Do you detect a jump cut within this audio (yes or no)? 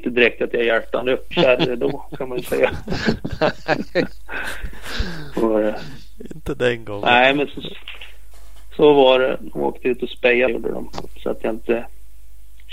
yes